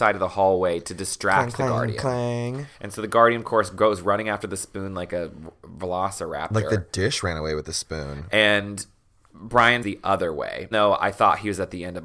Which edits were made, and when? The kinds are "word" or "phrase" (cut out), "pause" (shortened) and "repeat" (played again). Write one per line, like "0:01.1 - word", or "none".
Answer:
0:02.7 - pause
0:09.8 - word
0:10.7 - word